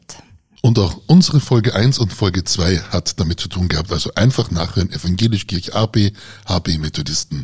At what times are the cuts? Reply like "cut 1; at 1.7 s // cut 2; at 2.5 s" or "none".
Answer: none

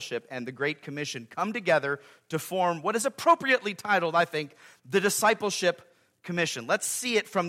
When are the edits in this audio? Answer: none

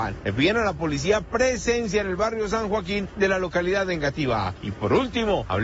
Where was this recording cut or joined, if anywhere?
none

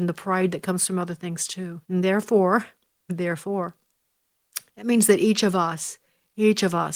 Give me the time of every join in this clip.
cut 1; at 1.8 s // cut 2; at 4.7 s

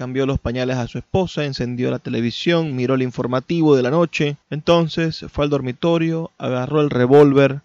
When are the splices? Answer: cut 1; at 4.4 s

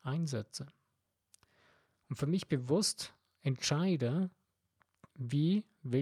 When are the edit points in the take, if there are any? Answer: none

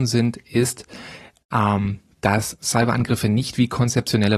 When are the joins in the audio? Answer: none

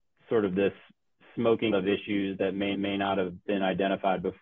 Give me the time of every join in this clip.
cut 1; at 1.7 s // cut 2; at 2.7 s

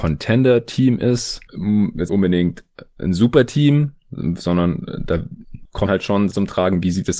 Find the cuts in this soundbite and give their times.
cut 1; at 2.1 s // cut 2; at 5.9 s // cut 3; at 6.3 s

